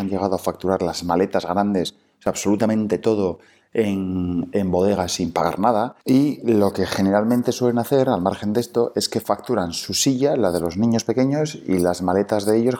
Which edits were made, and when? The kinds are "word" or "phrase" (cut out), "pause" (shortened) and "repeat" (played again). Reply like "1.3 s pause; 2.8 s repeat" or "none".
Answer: 6.0 s pause